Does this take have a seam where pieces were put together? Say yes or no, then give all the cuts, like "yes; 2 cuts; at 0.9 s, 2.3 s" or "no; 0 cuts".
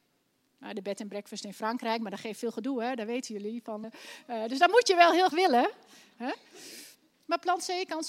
yes; 2 cuts; at 3.8 s, 5.3 s